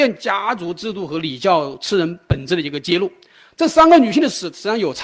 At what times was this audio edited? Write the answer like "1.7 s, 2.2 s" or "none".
none